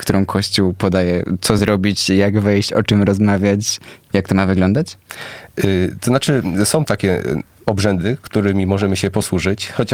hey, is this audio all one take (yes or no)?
yes